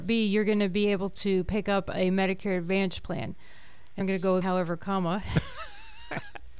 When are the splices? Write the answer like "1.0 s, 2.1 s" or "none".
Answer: 4.0 s, 4.4 s